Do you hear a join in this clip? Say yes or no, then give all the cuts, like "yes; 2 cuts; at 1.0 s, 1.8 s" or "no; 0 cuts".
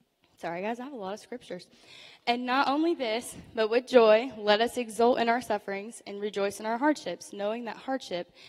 no; 0 cuts